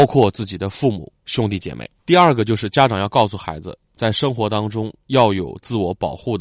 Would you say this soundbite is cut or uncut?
cut